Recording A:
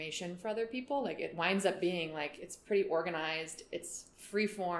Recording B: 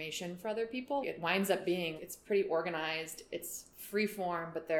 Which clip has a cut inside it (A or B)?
B